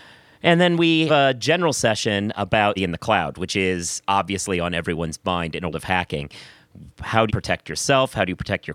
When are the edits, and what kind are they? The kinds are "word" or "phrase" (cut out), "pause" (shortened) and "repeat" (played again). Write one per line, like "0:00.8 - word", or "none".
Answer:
0:01.1 - word
0:02.8 - word
0:05.7 - word
0:07.3 - word